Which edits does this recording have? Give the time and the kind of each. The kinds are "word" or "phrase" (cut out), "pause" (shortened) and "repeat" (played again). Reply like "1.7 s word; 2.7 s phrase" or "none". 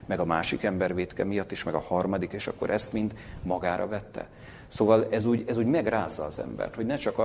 none